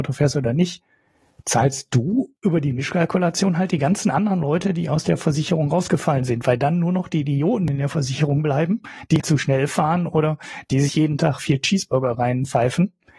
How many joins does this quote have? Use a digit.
3